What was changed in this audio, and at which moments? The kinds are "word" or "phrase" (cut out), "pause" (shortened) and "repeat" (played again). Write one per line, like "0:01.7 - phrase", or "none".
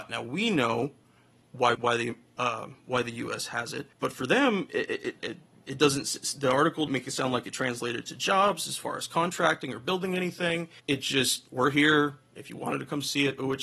0:01.7 - word
0:03.9 - pause
0:05.2 - word
0:06.9 - word
0:10.8 - pause
0:11.5 - pause